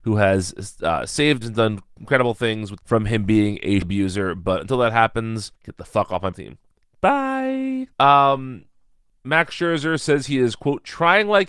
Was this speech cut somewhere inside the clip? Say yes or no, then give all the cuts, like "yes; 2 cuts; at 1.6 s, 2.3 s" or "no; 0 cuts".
yes; 6 cuts; at 1.4 s, 2.8 s, 3.8 s, 5.6 s, 6.3 s, 7.9 s